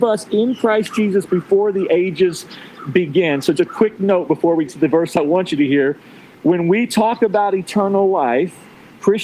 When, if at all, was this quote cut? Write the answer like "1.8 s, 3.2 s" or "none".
3.5 s, 4.7 s